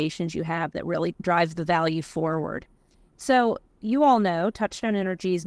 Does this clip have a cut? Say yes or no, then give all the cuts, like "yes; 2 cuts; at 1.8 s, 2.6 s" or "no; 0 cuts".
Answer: no; 0 cuts